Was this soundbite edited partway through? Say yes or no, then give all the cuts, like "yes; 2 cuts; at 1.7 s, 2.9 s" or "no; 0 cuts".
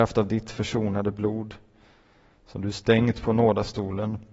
no; 0 cuts